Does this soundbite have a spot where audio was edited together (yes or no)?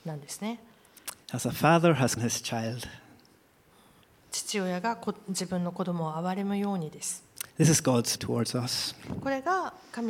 yes